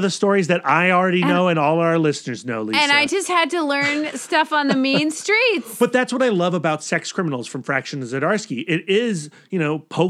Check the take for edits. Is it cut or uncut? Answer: uncut